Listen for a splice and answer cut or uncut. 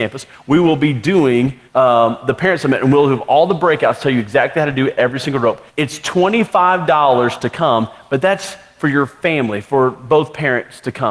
cut